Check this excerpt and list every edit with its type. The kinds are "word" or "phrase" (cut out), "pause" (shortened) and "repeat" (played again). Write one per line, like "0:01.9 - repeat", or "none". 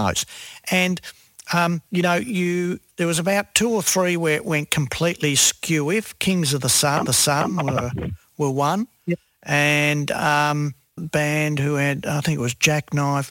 0:01.9 - pause
0:07.1 - repeat
0:11.0 - phrase